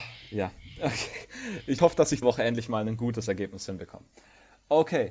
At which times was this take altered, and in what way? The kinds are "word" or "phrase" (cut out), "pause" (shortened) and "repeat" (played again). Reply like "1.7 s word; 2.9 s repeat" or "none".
1.8 s word; 2.2 s word